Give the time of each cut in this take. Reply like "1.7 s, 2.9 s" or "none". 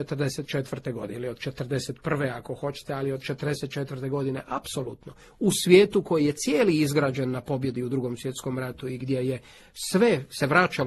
none